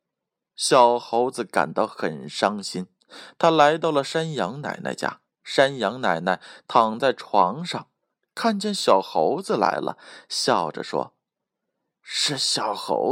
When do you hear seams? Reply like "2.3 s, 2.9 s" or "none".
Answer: 5.3 s